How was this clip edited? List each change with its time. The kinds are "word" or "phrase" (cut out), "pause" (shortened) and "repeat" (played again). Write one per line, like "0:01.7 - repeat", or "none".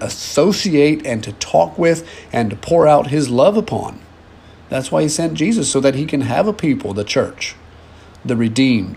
none